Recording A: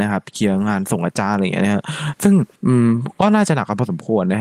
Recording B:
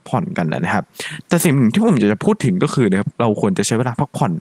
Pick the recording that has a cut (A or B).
A